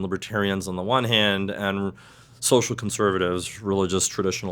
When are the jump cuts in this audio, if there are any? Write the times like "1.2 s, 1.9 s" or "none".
none

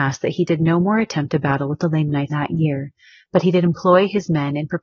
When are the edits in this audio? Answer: 2.3 s

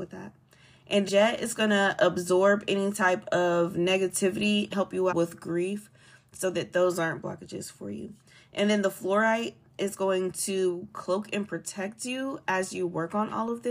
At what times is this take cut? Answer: 1.1 s, 4.7 s, 5.1 s

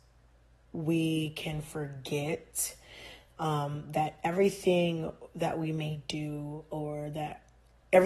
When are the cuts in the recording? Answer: none

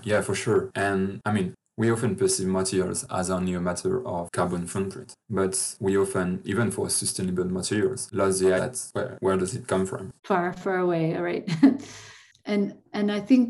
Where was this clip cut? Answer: 5.2 s, 8.6 s, 10.2 s

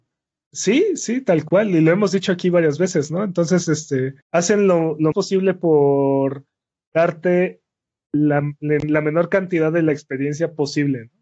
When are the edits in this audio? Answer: 4.2 s, 5.1 s

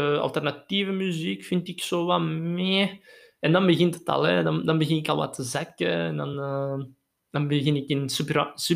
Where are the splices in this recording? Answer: none

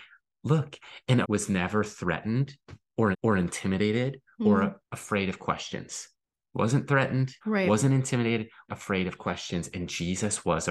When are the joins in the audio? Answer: 1.2 s, 3.1 s, 4.8 s, 6.2 s, 7.4 s, 8.7 s

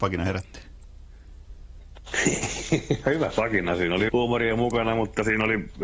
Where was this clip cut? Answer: 3.3 s, 4.1 s

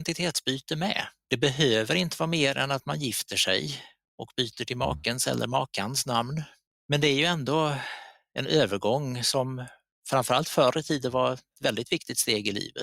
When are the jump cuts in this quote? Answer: none

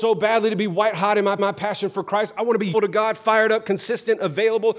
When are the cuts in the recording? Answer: 1.4 s, 2.7 s

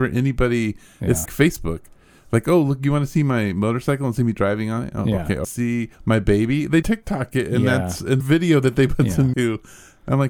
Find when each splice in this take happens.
1.3 s, 5.4 s, 5.9 s, 6.8 s, 8.2 s, 9.3 s

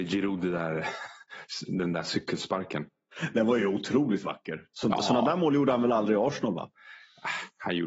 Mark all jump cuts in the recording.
none

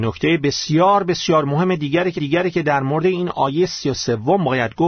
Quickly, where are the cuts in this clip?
2.2 s

